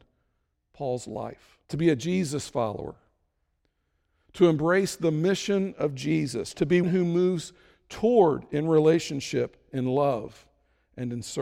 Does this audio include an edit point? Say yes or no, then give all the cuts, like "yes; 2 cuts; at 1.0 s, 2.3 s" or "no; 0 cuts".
yes; 2 cuts; at 1.6 s, 6.8 s